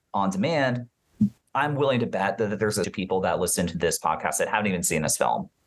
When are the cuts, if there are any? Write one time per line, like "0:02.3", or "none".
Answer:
0:01.4
0:02.8